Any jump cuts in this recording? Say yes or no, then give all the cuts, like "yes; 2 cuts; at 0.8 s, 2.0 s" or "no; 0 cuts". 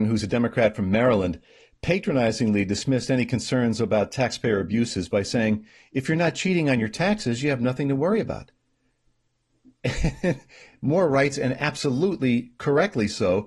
no; 0 cuts